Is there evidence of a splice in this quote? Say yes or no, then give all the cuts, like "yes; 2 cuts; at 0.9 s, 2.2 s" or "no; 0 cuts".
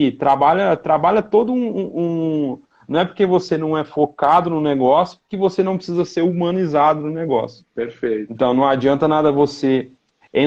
no; 0 cuts